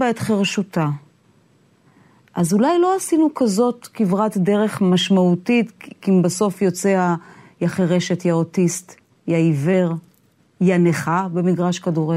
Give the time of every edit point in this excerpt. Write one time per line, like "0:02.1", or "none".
none